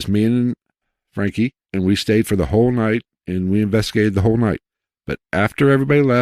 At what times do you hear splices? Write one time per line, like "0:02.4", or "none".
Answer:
0:01.6